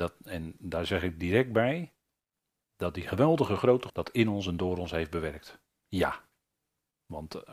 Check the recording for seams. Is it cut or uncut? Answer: cut